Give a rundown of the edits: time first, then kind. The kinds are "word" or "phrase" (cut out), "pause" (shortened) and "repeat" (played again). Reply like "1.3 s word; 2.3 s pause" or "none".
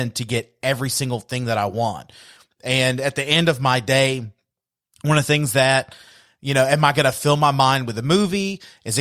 none